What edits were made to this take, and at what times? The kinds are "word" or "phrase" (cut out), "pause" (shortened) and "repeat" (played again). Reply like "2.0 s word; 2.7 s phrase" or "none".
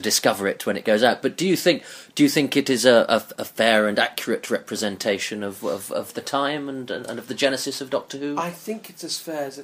none